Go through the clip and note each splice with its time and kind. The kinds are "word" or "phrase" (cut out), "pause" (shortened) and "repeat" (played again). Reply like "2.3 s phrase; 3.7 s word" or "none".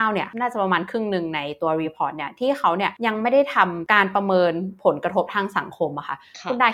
none